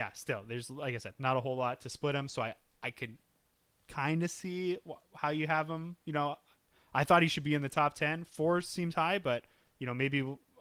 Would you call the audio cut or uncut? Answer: uncut